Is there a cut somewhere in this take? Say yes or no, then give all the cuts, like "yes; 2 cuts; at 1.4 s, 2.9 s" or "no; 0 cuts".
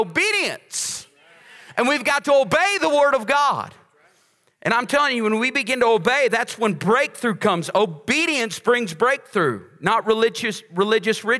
no; 0 cuts